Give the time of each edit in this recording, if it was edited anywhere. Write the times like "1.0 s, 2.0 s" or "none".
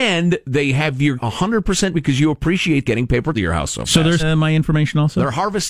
1.2 s, 1.9 s, 2.9 s, 3.3 s, 4.2 s